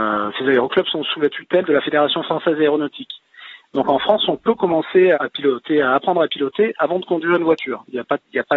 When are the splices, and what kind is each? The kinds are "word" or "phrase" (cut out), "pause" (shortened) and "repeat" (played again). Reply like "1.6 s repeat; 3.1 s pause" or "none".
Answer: 5.1 s word